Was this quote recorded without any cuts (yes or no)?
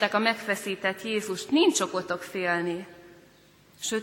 yes